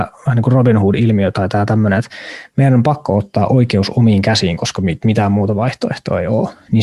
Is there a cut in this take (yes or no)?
no